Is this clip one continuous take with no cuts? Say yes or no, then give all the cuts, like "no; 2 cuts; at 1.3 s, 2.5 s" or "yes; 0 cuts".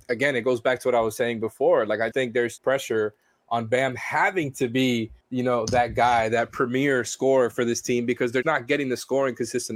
no; 4 cuts; at 2.1 s, 2.6 s, 5.2 s, 8.4 s